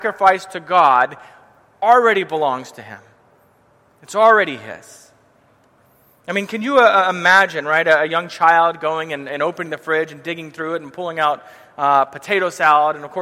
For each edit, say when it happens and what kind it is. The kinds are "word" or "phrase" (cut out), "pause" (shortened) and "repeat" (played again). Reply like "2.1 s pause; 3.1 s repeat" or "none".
none